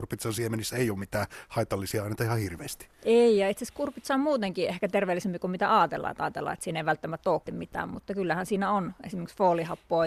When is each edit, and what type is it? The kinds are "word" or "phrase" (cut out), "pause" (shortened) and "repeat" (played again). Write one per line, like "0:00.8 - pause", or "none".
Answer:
0:07.4 - word